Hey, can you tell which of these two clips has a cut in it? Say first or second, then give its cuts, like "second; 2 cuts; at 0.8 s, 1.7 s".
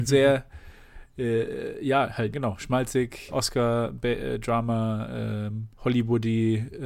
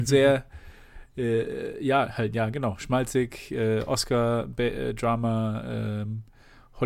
first; 3 cuts; at 2.3 s, 3.3 s, 5.7 s